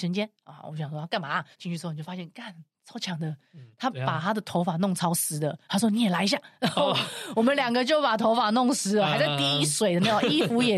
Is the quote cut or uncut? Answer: cut